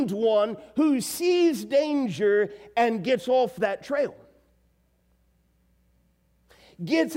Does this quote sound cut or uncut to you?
uncut